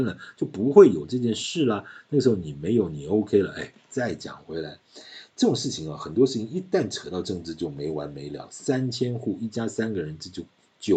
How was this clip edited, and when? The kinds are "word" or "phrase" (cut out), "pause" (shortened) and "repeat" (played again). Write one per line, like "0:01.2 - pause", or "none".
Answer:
none